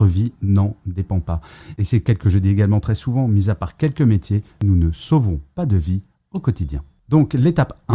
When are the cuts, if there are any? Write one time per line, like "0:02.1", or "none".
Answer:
0:02.2